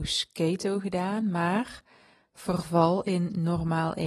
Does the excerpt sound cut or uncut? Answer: uncut